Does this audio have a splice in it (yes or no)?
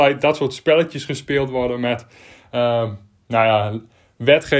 no